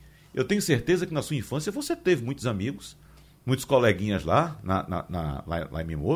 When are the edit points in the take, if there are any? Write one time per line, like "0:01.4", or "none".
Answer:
none